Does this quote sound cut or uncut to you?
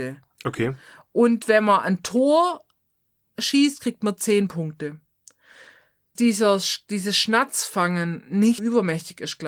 cut